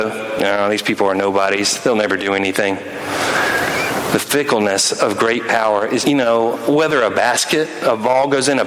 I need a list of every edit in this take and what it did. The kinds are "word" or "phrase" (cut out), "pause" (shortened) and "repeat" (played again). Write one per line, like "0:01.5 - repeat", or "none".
0:06.0 - word

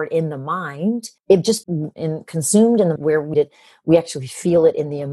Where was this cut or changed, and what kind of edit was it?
0:01.2 - pause
0:01.6 - word
0:01.9 - word
0:03.0 - word
0:03.3 - phrase

